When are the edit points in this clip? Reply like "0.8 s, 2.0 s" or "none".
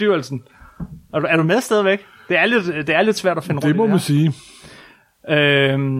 none